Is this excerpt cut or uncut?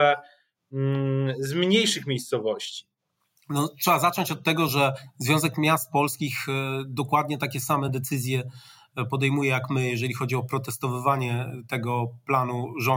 uncut